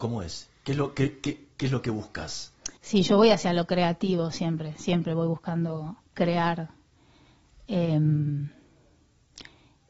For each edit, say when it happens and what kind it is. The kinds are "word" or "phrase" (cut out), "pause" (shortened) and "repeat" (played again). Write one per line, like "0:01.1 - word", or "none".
0:02.8 - pause
0:06.1 - pause